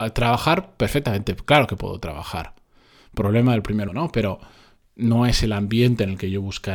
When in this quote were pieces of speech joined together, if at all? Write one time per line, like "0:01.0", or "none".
0:03.9